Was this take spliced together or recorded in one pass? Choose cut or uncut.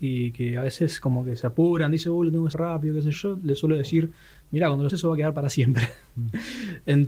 cut